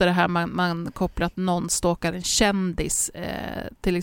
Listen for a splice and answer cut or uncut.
uncut